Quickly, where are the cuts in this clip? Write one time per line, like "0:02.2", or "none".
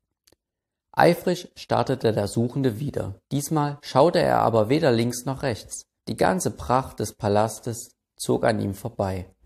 0:03.2
0:06.0